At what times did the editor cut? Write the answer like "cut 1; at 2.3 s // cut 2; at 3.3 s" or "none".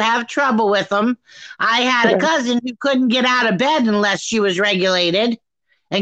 none